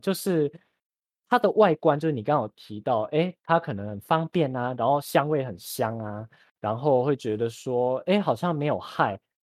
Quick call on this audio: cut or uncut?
uncut